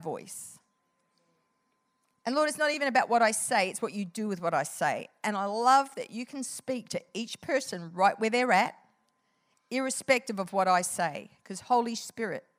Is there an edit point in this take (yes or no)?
no